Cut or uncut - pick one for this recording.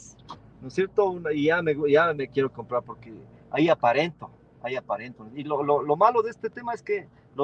uncut